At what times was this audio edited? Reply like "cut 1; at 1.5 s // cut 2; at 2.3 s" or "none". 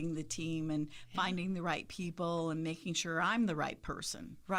none